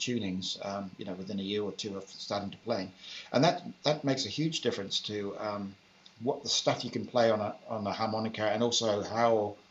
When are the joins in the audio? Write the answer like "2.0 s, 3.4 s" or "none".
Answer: none

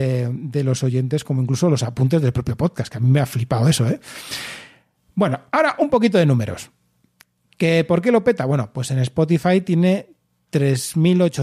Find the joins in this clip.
none

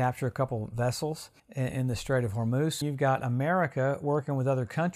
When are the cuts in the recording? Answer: 1.4 s, 2.8 s

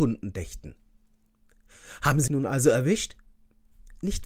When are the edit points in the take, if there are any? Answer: 2.3 s

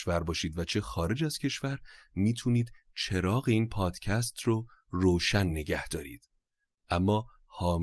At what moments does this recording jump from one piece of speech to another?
none

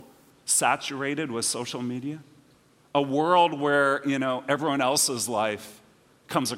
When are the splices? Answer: none

